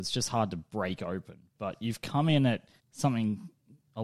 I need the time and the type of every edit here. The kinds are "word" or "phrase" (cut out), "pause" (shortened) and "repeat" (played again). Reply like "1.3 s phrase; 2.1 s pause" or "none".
2.8 s pause